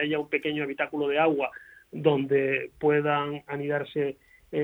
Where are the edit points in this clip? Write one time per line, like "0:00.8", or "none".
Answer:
none